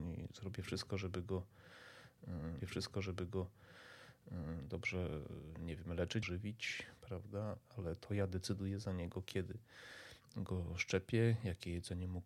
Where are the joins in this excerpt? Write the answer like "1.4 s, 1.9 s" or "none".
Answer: 2.6 s, 6.2 s